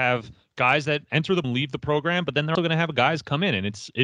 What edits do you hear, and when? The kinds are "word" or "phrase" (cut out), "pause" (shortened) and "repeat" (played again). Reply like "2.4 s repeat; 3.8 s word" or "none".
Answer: 1.4 s word; 2.5 s word